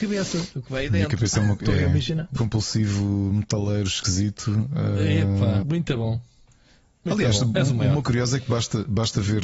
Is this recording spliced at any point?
yes; 3 cuts; at 2.4 s, 5.6 s, 8.0 s

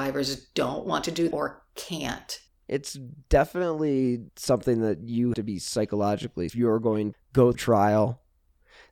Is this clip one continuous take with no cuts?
no; 7 cuts; at 1.3 s, 2.5 s, 4.3 s, 5.3 s, 6.5 s, 7.1 s, 7.5 s

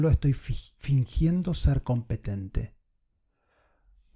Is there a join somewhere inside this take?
no; 0 cuts

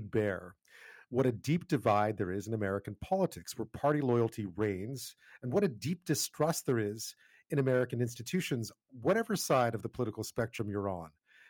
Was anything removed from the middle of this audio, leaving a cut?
no; 0 cuts

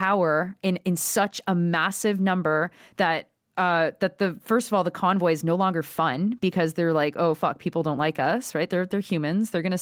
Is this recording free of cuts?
yes; 0 cuts

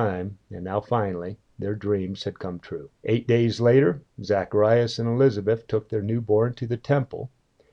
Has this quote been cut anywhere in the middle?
yes; 1 cut; at 3.0 s

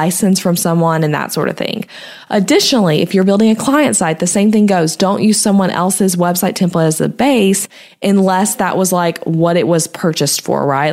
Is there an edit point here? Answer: no; 0 cuts

